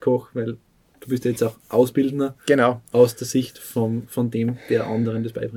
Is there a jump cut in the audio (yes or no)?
no